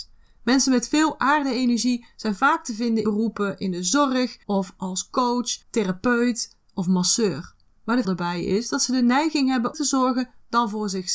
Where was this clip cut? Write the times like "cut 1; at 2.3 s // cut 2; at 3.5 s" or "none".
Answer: cut 1; at 3.0 s // cut 2; at 4.4 s // cut 3; at 5.6 s // cut 4; at 7.7 s // cut 5; at 8.0 s // cut 6; at 9.7 s